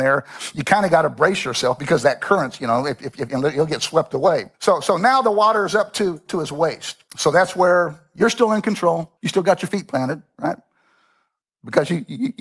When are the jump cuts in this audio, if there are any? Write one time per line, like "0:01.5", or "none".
0:04.5
0:07.1
0:09.2